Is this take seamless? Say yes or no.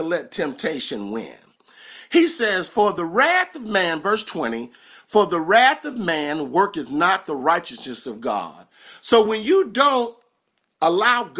yes